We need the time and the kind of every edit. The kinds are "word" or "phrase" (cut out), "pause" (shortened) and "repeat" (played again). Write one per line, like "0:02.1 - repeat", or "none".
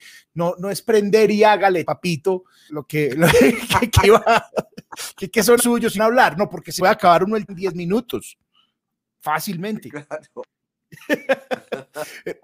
0:01.8 - word
0:02.7 - word
0:04.0 - word
0:05.6 - word
0:06.0 - word
0:06.8 - word
0:07.5 - word